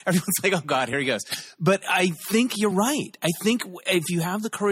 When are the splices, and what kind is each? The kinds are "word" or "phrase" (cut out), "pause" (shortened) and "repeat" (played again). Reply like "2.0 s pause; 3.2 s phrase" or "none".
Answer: none